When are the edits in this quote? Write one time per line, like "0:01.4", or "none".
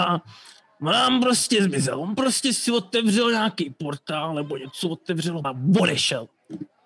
0:05.4